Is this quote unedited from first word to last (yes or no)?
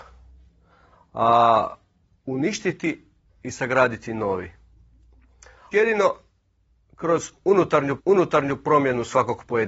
no